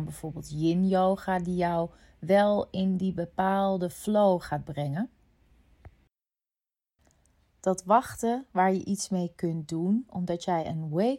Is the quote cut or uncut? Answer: uncut